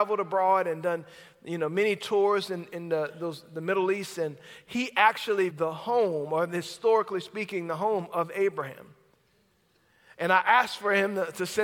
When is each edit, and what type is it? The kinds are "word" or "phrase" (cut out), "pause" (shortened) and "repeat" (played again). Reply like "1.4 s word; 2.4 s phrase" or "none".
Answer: 5.5 s word

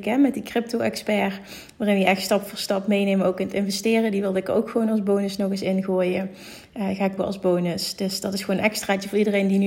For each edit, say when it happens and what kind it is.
7.2 s word

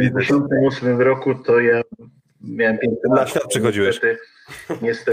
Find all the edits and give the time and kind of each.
none

